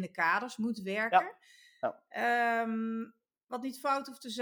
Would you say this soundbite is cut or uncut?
uncut